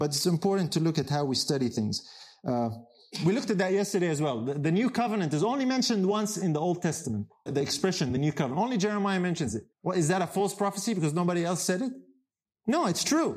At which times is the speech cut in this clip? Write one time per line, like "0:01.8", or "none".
0:07.5
0:09.7